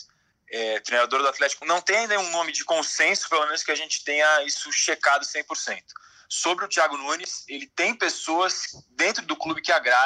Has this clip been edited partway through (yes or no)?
yes